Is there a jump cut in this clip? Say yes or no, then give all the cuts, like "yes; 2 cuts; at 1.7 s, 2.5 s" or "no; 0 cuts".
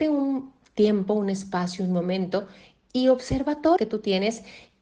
yes; 1 cut; at 3.8 s